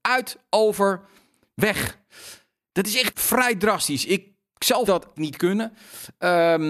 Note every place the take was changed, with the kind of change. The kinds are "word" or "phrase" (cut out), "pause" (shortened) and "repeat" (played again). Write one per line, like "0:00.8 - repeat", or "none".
0:03.1 - word
0:04.9 - word
0:05.2 - word